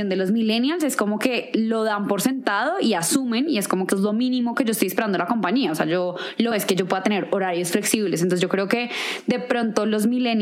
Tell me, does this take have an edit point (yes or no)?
yes